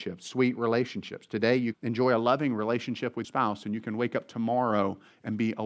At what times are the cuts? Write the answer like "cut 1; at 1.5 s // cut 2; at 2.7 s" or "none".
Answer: cut 1; at 1.7 s // cut 2; at 3.2 s